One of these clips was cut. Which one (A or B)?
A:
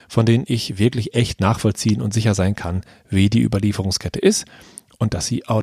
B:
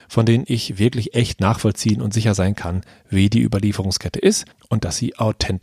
B